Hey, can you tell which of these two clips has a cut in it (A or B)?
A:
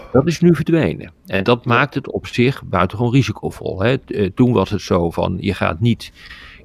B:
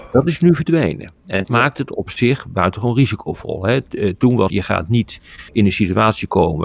B